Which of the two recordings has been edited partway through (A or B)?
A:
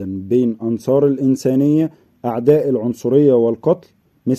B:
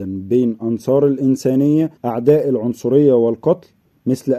B